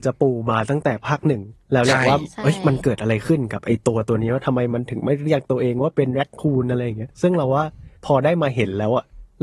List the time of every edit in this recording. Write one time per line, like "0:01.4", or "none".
0:01.6
0:08.0